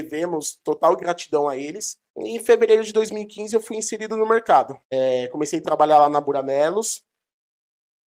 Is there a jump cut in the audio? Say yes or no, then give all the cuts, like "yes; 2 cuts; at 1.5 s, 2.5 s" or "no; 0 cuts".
yes; 2 cuts; at 2.1 s, 4.8 s